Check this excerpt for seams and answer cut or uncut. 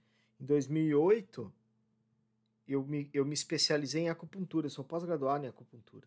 uncut